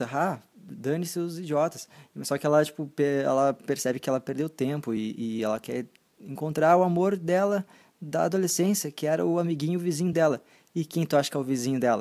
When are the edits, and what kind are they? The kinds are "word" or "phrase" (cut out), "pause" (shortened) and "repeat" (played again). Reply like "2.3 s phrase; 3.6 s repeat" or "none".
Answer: none